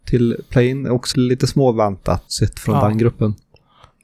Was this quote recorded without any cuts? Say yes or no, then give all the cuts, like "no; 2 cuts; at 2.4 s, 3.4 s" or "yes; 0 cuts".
no; 2 cuts; at 1.1 s, 2.3 s